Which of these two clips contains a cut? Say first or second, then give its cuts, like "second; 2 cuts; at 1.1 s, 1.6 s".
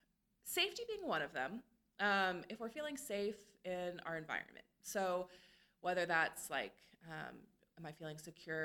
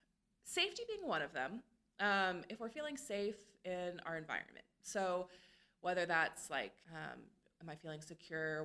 second; 1 cut; at 6.8 s